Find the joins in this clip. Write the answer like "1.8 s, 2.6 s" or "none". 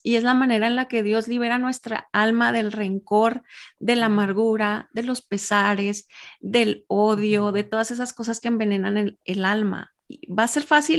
none

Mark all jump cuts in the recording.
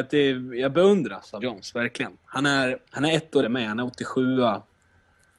1.4 s, 2.2 s, 2.9 s, 3.4 s

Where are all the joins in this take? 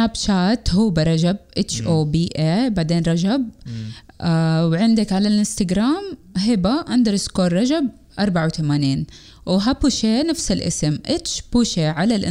none

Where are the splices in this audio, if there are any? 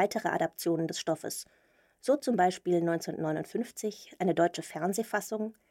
none

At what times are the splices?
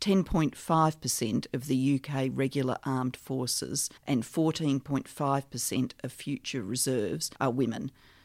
4.0 s, 7.4 s

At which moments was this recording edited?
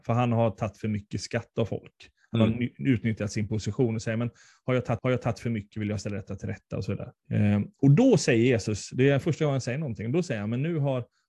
5.0 s, 7.2 s

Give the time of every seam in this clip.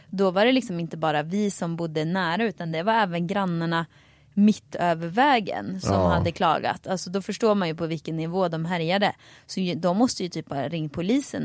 none

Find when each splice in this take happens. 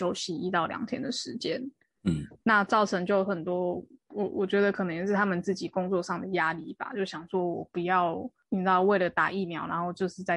2.3 s

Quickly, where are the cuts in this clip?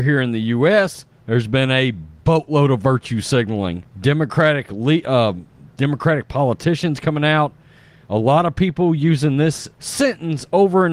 1.1 s, 3.9 s, 9.7 s

